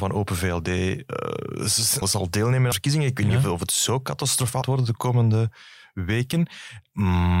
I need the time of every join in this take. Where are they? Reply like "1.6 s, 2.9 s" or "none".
2.0 s, 2.7 s, 4.6 s